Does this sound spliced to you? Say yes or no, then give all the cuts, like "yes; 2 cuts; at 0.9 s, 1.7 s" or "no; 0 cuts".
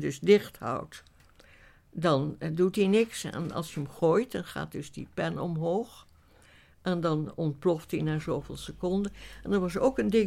no; 0 cuts